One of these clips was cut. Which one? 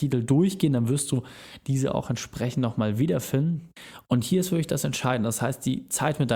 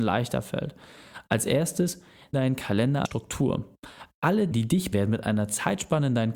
second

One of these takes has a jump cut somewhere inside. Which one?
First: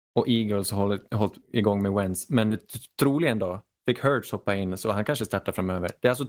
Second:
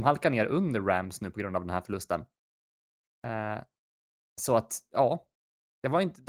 first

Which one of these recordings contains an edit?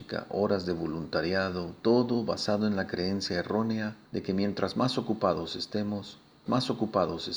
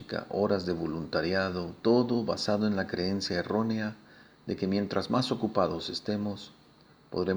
first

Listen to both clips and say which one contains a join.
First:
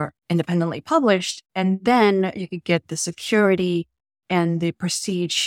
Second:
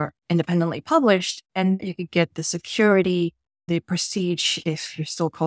second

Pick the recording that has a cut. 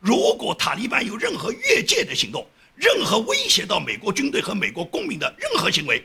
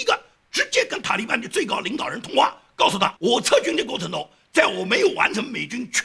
second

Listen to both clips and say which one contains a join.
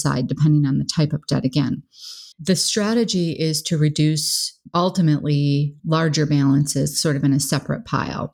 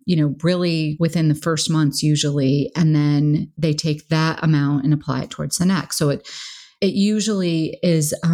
first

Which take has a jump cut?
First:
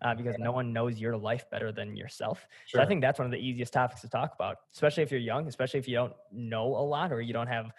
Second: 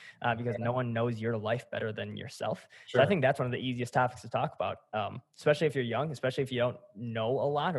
first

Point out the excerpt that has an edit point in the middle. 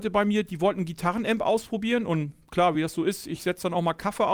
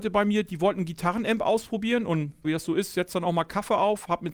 second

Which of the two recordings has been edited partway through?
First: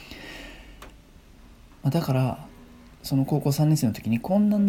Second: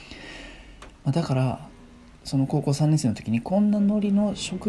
second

